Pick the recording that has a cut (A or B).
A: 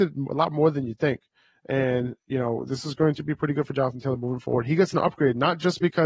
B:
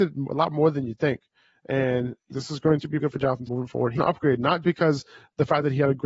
B